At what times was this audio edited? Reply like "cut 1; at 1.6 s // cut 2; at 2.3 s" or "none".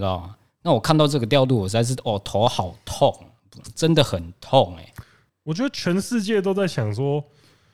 none

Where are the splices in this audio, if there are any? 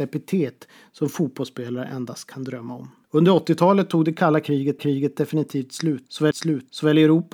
cut 1; at 4.8 s // cut 2; at 6.3 s

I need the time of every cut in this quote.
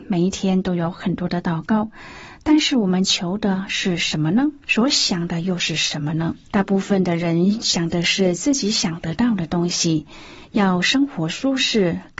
cut 1; at 4.6 s // cut 2; at 6.5 s

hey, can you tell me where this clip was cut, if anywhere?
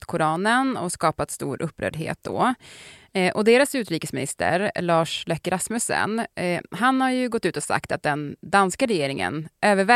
none

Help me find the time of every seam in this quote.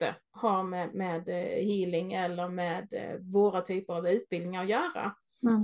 none

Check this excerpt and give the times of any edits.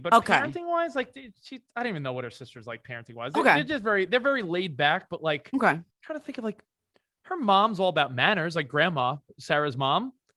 cut 1; at 5.9 s

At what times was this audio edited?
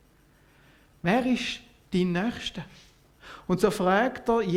none

